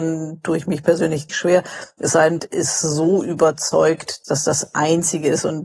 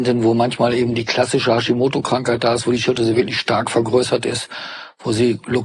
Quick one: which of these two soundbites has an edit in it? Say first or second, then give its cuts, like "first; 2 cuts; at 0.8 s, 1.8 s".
first; 3 cuts; at 1.3 s, 2.4 s, 4.2 s